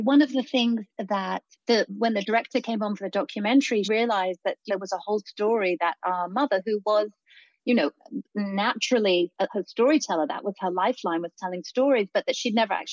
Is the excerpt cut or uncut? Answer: cut